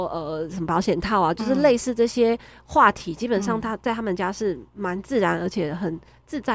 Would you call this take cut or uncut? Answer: uncut